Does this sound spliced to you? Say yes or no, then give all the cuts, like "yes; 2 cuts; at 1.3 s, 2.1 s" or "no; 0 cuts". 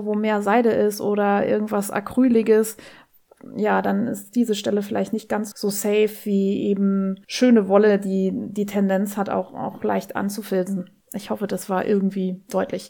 yes; 3 cuts; at 5.5 s, 7.2 s, 11.0 s